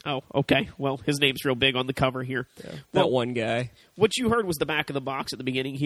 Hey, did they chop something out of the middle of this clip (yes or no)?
no